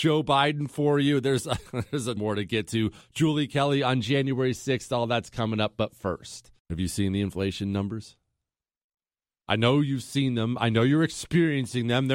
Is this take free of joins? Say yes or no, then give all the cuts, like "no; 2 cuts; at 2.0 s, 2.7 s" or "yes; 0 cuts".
no; 2 cuts; at 2.2 s, 6.6 s